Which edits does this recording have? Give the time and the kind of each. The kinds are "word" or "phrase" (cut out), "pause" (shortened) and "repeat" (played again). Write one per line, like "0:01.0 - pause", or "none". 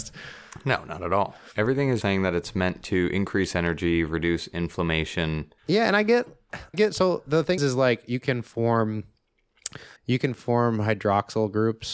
0:02.0 - word
0:05.6 - pause
0:06.7 - word
0:07.6 - word
0:10.0 - pause